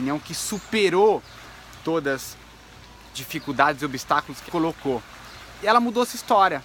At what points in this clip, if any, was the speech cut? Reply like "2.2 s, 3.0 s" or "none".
3.1 s, 4.5 s